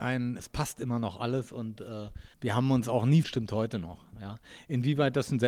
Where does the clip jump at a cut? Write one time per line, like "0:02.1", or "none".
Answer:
0:02.3
0:03.2